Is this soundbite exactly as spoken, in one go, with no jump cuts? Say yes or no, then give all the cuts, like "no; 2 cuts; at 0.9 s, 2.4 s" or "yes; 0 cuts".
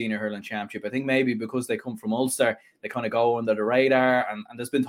yes; 0 cuts